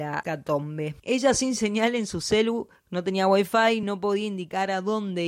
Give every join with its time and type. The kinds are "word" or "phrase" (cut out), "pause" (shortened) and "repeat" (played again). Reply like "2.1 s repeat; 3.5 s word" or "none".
none